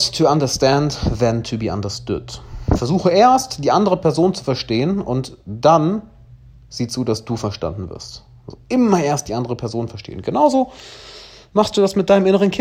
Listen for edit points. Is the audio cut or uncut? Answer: uncut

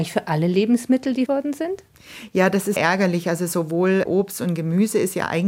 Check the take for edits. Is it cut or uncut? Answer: cut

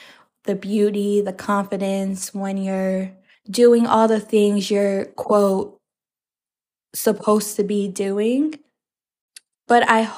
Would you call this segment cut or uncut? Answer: cut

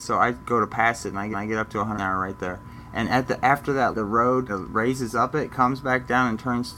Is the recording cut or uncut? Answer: cut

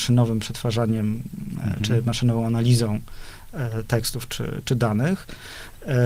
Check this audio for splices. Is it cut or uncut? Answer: uncut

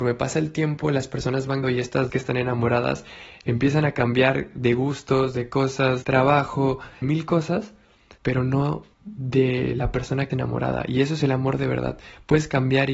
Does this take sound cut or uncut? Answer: cut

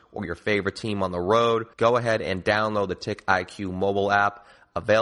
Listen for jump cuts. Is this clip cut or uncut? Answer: cut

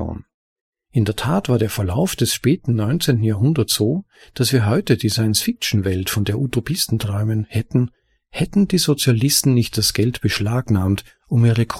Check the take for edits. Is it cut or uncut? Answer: uncut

